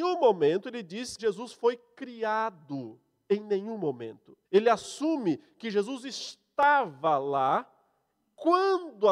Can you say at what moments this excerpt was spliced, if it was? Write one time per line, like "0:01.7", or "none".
0:01.2
0:04.4